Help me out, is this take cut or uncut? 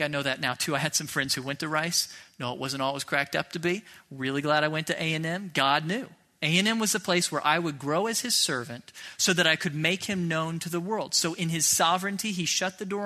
uncut